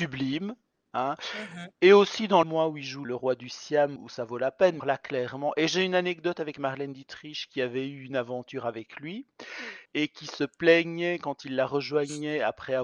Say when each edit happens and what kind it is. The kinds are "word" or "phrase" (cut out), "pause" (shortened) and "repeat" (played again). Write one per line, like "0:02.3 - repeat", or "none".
0:01.7 - pause
0:02.4 - phrase
0:03.0 - word
0:04.0 - word
0:04.8 - word
0:09.9 - pause